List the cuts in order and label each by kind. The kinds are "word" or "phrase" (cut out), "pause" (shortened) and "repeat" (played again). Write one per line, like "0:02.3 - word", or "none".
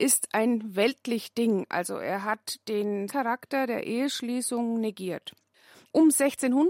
0:03.1 - word